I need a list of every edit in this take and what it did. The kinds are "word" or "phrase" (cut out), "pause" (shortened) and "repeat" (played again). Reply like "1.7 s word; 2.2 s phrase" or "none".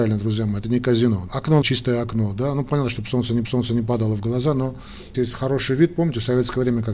1.3 s word; 1.6 s phrase; 3.4 s repeat; 5.1 s word